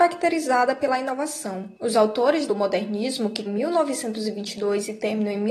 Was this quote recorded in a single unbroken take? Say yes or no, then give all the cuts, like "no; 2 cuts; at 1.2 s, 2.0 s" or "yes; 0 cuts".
no; 3 cuts; at 1.8 s, 2.5 s, 3.5 s